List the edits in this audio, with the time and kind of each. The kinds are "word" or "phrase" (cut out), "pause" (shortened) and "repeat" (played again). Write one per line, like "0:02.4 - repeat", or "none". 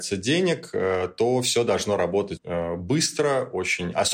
0:02.4 - word